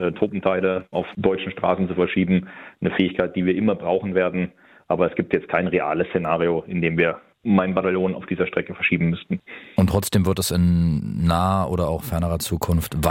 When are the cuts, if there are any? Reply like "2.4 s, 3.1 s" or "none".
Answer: 0.9 s